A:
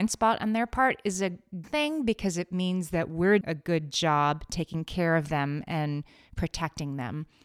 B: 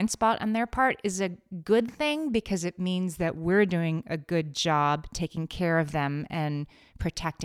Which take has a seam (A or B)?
A